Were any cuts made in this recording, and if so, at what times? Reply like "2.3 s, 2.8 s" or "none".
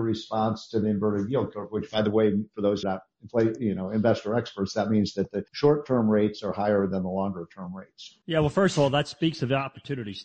2.8 s, 5.5 s, 8.2 s